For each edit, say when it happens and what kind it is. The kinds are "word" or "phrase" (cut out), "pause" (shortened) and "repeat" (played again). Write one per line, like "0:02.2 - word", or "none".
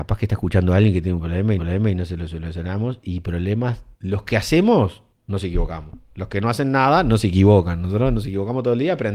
0:01.6 - repeat
0:03.9 - pause